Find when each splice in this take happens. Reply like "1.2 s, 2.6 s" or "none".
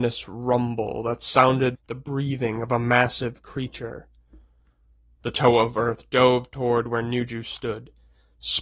1.7 s

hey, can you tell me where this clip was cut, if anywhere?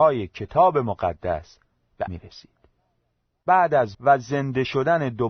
2.1 s, 3.9 s

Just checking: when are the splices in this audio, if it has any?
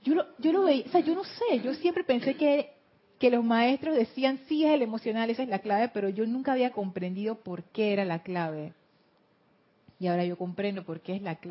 none

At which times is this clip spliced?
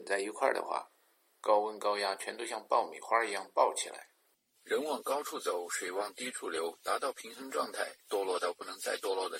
8.0 s

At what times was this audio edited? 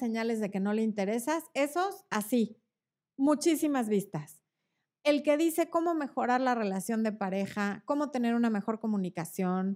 none

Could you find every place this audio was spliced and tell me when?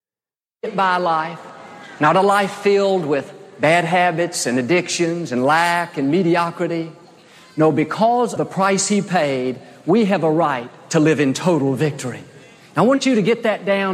8.4 s

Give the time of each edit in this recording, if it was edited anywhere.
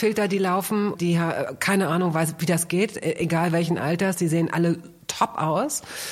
0.9 s

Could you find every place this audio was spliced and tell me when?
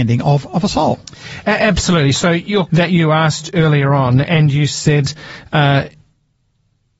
2.7 s

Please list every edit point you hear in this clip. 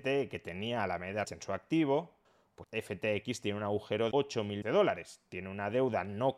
1.2 s, 2.6 s, 4.1 s, 4.6 s

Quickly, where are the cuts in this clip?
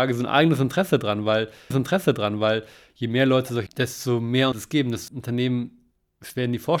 1.7 s, 3.7 s, 4.5 s, 5.1 s

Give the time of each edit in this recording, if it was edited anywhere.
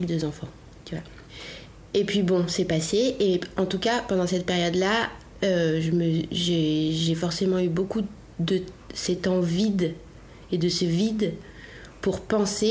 none

